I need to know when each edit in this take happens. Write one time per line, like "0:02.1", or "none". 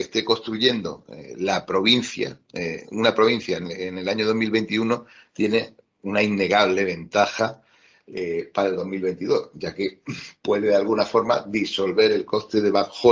none